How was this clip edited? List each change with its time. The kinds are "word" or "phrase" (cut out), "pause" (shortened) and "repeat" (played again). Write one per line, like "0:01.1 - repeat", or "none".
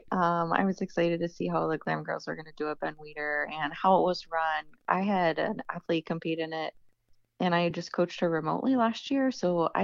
none